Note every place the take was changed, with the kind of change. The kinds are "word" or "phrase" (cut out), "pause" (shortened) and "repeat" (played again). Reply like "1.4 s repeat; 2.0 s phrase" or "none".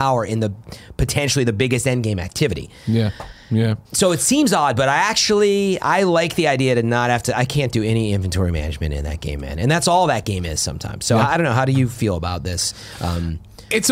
3.8 s pause